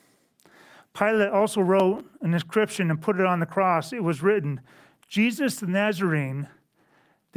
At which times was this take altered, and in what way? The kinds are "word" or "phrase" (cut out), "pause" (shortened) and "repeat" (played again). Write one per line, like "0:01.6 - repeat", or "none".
none